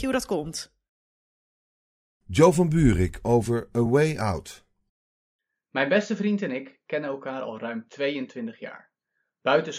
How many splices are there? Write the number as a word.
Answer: zero